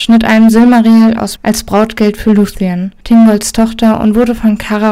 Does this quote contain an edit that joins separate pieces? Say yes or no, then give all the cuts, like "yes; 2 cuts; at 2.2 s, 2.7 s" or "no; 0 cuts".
yes; 2 cuts; at 1.4 s, 3.0 s